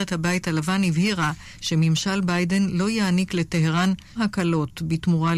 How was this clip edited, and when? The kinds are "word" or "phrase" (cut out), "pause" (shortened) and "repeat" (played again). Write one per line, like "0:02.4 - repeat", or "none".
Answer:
0:04.1 - word